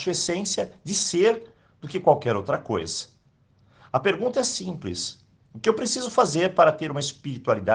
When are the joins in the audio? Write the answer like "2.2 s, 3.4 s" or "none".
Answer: none